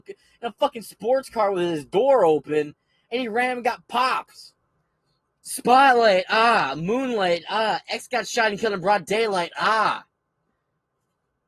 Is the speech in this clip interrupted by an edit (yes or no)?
no